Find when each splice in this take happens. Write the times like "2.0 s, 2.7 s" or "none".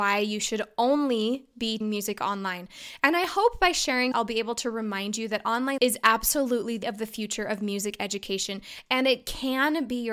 1.8 s, 4.1 s, 5.8 s, 6.8 s